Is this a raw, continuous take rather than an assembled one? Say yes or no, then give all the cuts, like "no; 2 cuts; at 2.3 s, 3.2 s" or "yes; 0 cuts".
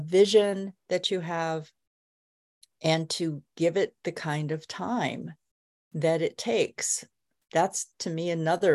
yes; 0 cuts